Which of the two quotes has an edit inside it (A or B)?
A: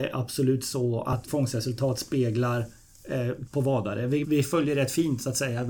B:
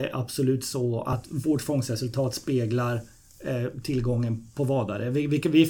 A